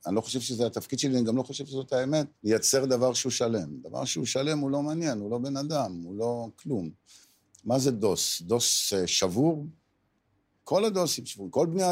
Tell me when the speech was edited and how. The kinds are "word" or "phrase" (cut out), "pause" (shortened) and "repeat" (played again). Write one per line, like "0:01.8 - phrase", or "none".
0:02.4 - pause